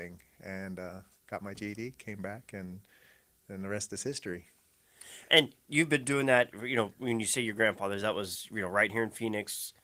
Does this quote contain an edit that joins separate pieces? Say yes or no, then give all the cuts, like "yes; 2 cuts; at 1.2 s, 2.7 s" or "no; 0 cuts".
no; 0 cuts